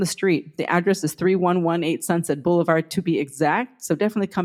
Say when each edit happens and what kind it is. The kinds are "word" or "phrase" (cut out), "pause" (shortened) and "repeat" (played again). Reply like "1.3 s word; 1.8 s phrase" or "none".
none